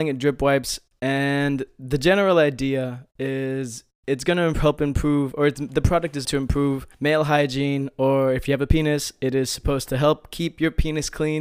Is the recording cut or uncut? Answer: cut